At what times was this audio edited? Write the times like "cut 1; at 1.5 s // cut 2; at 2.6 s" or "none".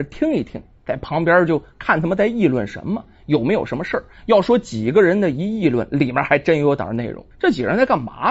cut 1; at 7.3 s